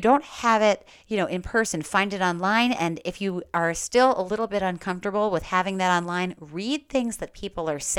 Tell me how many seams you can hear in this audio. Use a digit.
0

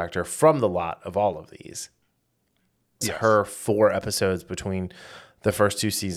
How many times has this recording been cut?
1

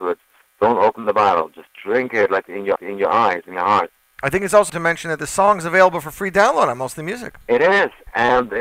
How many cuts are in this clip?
3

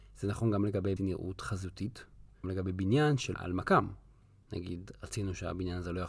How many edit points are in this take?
3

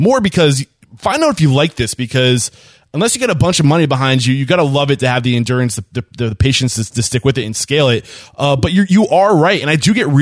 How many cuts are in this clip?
0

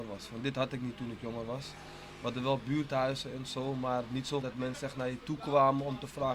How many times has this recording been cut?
1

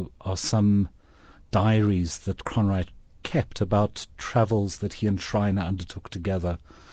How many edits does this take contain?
0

